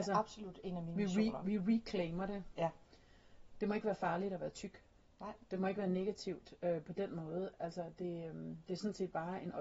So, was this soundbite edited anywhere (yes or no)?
no